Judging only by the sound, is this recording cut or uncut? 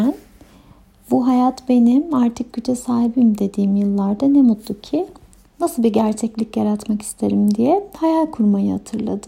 uncut